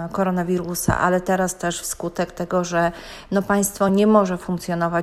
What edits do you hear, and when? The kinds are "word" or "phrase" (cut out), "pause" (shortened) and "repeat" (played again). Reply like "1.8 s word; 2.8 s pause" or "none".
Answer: none